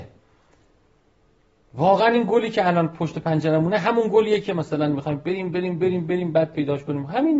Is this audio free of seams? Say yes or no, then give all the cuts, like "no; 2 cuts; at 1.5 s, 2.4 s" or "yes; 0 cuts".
yes; 0 cuts